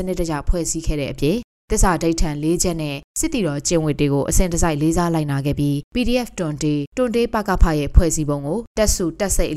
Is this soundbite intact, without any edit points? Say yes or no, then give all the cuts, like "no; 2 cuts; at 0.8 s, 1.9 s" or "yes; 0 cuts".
yes; 0 cuts